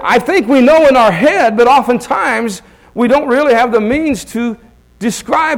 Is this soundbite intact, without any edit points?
yes; 0 cuts

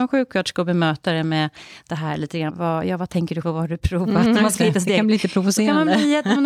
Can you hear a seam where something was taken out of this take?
yes; 2 cuts; at 2.5 s, 3.4 s

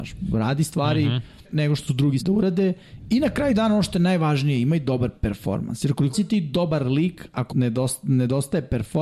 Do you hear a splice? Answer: yes; 5 cuts; at 1.4 s, 1.9 s, 2.2 s, 6.1 s, 7.5 s

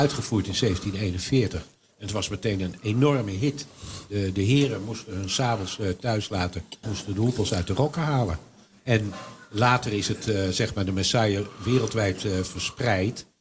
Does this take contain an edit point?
yes; 1 cut; at 6.8 s

